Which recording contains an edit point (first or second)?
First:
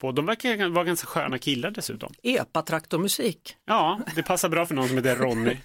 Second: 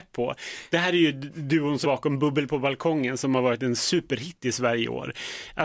second